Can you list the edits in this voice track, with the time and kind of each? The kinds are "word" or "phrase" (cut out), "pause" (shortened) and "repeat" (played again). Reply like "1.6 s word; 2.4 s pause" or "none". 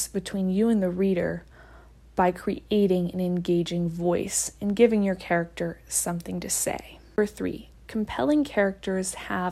none